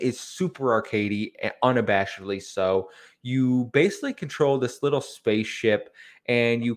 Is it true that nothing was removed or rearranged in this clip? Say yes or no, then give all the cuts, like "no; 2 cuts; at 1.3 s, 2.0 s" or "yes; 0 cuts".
yes; 0 cuts